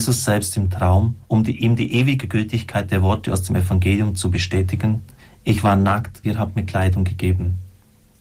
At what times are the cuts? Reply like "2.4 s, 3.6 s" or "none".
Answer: 1.2 s, 5.2 s, 6.2 s